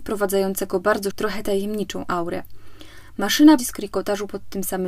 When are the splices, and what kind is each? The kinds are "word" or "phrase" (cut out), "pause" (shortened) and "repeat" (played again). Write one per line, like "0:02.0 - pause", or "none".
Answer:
0:01.1 - word
0:03.6 - word